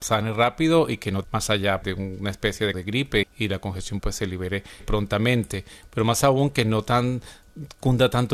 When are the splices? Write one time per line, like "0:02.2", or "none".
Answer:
0:01.2
0:01.8
0:02.7
0:03.2
0:04.0
0:04.8